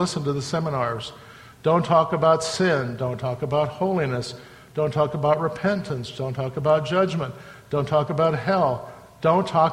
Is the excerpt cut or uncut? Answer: uncut